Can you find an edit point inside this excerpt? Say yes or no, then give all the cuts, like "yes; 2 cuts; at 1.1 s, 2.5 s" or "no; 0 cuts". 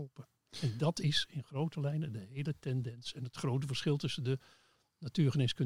no; 0 cuts